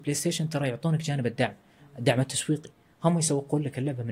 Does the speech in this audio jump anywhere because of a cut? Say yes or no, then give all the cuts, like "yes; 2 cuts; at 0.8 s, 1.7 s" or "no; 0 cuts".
no; 0 cuts